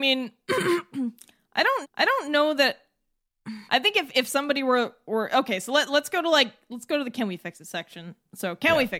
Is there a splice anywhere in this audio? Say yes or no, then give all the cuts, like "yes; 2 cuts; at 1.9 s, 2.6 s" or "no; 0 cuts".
yes; 2 cuts; at 1.8 s, 3.7 s